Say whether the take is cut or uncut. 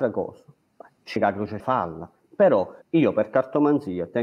cut